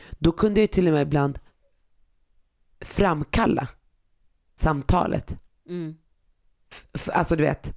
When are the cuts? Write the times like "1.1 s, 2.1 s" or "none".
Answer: none